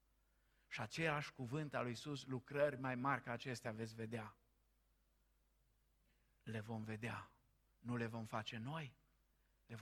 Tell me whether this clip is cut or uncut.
uncut